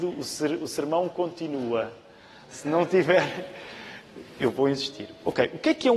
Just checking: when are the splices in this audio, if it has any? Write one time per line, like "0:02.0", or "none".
none